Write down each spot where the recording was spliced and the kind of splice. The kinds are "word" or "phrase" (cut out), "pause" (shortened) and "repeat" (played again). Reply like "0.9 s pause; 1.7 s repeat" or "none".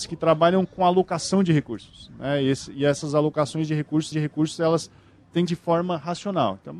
4.1 s repeat; 5.5 s phrase